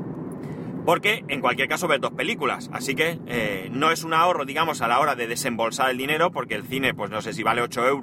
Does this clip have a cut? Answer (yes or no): no